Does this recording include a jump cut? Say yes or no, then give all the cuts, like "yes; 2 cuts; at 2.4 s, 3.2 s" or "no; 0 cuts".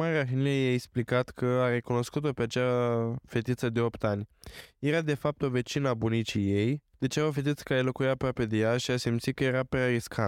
yes; 1 cut; at 6.9 s